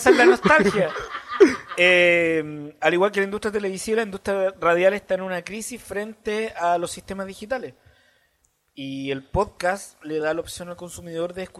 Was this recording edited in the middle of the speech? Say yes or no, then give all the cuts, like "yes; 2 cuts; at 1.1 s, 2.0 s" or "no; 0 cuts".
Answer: no; 0 cuts